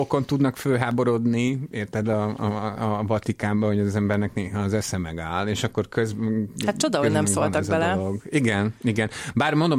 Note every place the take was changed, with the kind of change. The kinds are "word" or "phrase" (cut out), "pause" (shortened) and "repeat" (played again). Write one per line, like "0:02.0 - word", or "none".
none